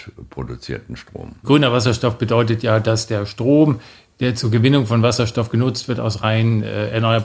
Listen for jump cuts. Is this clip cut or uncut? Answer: uncut